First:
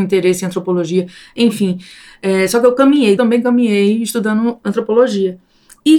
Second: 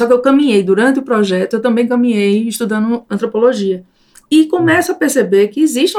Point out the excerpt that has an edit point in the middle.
first; 1 cut; at 3.2 s

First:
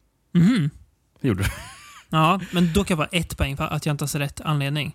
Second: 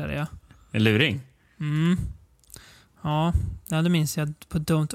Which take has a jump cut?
first; 2 cuts; at 2.9 s, 3.6 s

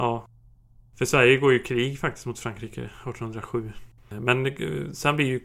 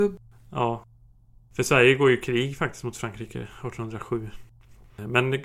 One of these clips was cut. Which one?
first; 1 cut; at 4.0 s

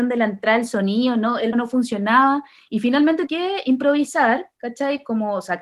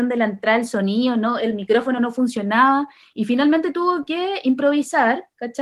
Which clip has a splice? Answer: first; 2 cuts; at 1.5 s, 3.3 s

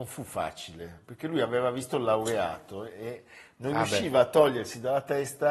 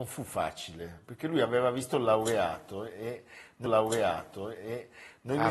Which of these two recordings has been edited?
second; 1 cut; at 3.7 s

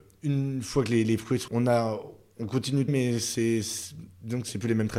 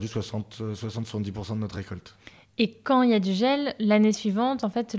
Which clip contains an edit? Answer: first; 2 cuts; at 1.5 s, 2.9 s

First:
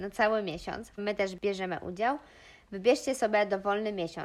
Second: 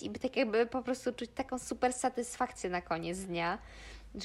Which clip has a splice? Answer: first; 1 cut; at 1.0 s

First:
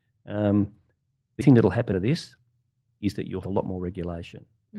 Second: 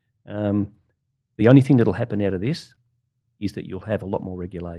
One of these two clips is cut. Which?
first; 3 cuts; at 1.4 s, 1.9 s, 3.4 s

